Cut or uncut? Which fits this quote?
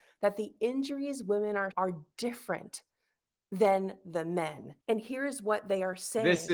cut